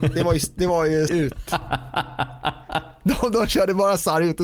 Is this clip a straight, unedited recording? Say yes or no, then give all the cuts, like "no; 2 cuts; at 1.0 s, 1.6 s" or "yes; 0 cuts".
no; 1 cut; at 1.1 s